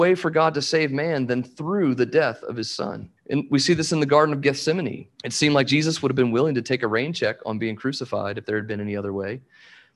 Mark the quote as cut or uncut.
cut